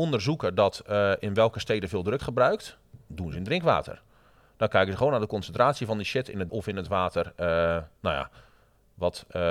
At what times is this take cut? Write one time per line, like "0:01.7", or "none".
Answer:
0:02.2
0:06.5